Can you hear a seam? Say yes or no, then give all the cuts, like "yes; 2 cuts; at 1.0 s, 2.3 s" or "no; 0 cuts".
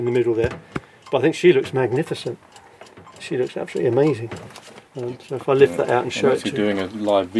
yes; 1 cut; at 4.9 s